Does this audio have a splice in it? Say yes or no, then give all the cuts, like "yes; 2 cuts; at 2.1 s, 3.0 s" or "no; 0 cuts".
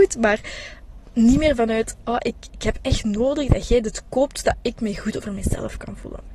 no; 0 cuts